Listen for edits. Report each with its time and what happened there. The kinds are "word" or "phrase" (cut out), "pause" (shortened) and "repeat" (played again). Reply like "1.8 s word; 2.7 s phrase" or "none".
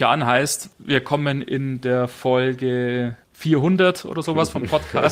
3.2 s pause